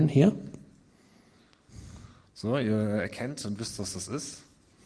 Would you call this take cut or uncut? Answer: uncut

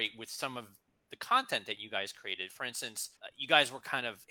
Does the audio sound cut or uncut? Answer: cut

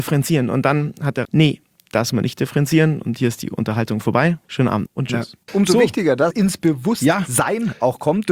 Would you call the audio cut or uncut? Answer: cut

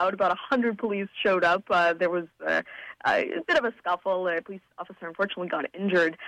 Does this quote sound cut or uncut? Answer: cut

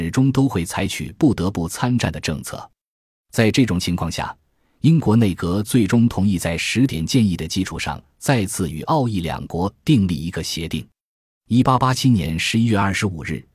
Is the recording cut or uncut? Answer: uncut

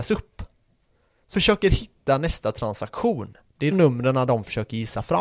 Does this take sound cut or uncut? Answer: cut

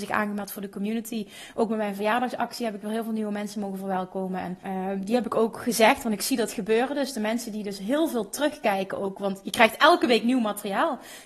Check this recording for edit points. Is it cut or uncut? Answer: cut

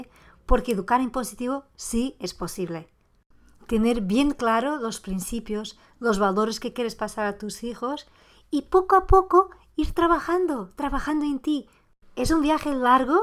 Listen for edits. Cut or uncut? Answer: uncut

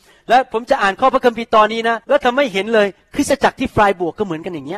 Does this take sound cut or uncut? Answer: cut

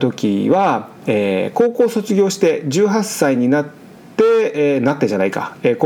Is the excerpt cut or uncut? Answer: uncut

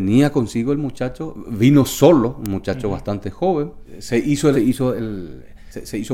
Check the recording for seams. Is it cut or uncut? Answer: cut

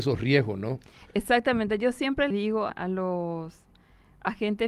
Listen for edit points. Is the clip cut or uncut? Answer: cut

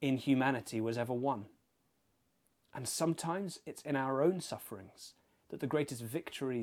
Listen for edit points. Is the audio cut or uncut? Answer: uncut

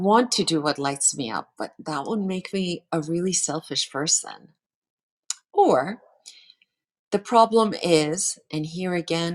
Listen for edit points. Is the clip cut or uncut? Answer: uncut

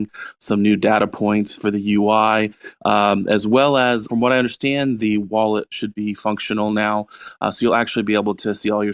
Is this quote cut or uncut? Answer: cut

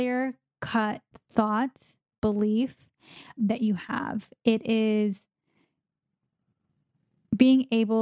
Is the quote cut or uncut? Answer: cut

